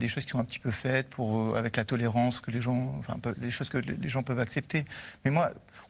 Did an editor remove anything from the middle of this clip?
no; 0 cuts

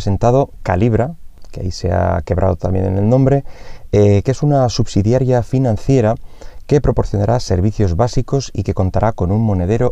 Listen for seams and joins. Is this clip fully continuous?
yes; 0 cuts

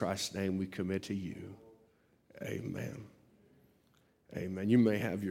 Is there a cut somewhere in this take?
yes; 1 cut; at 1.0 s

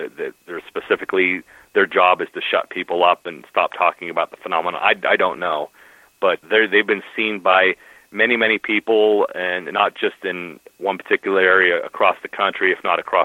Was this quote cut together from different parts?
yes; 1 cut; at 6.4 s

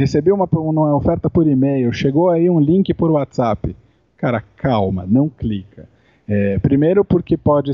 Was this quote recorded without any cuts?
yes; 0 cuts

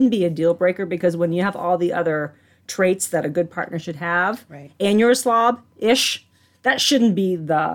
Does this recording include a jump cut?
no; 0 cuts

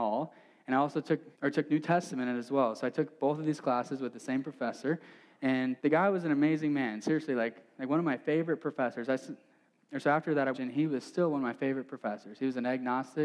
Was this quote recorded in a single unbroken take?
no; 3 cuts; at 1.3 s, 5.8 s, 10.5 s

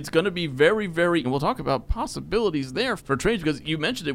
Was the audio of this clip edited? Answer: yes; 2 cuts; at 1.2 s, 3.0 s

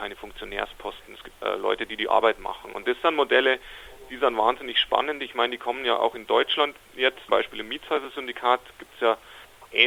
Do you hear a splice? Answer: yes; 2 cuts; at 1.4 s, 7.3 s

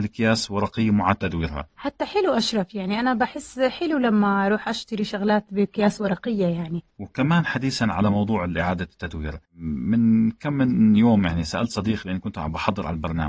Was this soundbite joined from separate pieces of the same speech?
yes; 2 cuts; at 6.9 s, 9.4 s

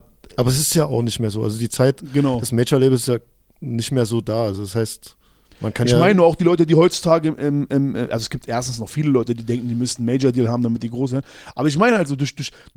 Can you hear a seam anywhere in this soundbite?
no; 0 cuts

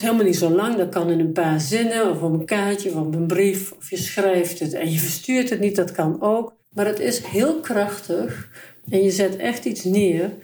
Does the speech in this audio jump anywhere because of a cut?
yes; 1 cut; at 6.6 s

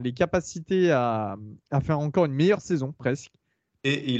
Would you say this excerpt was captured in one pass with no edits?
yes; 0 cuts

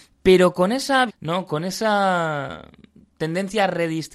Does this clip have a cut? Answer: yes; 1 cut; at 1.1 s

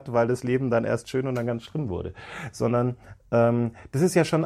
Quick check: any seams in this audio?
no; 0 cuts

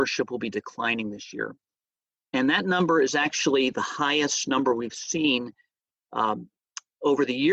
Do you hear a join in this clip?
no; 0 cuts

